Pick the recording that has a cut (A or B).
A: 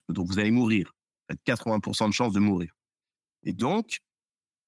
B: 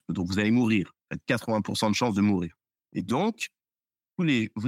B